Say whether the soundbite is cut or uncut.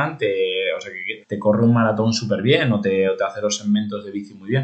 cut